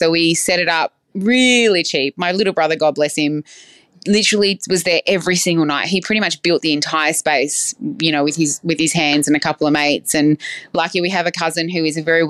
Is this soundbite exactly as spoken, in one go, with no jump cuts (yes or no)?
no